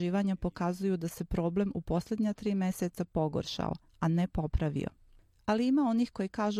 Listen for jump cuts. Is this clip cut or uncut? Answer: uncut